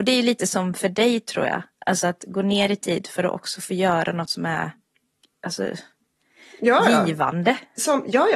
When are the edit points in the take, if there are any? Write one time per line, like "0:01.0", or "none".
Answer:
none